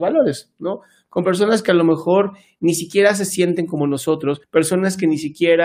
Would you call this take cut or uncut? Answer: cut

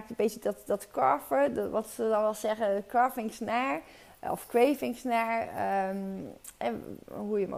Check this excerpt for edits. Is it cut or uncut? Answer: uncut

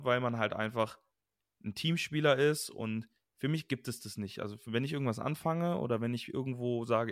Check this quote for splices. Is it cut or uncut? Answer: uncut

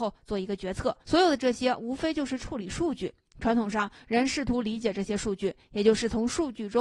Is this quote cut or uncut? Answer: cut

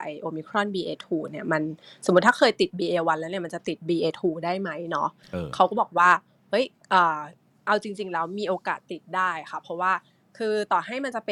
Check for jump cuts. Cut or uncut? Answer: uncut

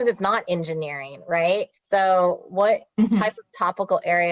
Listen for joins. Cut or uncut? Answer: cut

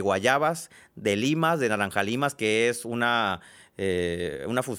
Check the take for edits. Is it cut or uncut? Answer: uncut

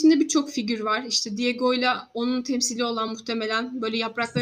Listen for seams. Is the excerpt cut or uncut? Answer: uncut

